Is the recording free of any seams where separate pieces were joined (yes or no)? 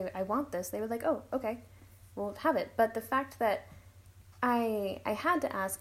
yes